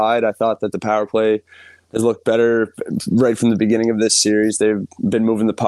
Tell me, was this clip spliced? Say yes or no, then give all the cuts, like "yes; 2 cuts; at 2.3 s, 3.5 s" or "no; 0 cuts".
no; 0 cuts